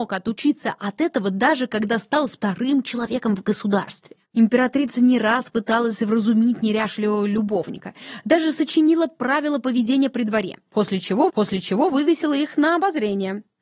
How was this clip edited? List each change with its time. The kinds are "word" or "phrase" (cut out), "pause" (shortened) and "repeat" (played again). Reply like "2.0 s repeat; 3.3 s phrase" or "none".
4.3 s pause; 11.3 s repeat

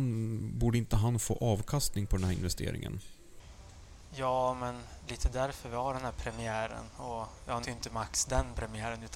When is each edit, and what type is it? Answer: 5.1 s phrase; 7.6 s word

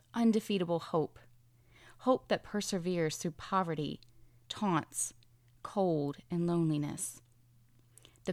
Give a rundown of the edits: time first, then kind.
none

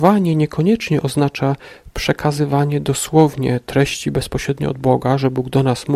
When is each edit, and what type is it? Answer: none

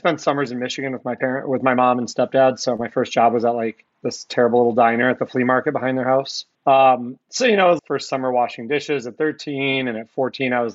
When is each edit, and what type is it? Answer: 3.9 s pause; 6.5 s pause; 7.8 s word

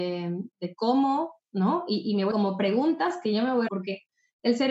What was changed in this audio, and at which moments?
2.3 s word; 3.7 s word

